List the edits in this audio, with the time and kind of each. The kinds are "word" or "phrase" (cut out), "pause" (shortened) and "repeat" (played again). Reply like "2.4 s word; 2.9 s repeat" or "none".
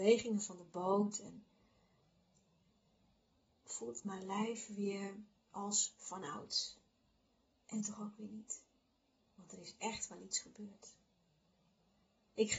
none